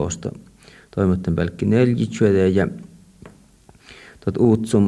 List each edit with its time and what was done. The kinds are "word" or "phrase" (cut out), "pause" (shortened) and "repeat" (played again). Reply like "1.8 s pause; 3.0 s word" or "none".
none